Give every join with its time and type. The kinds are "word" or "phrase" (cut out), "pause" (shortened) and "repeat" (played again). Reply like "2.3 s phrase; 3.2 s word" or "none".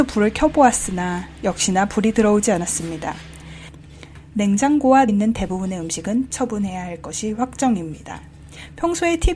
5.1 s word; 6.3 s word